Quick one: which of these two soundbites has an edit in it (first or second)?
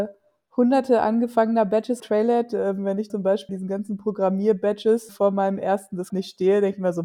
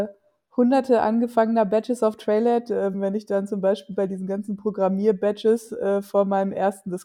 first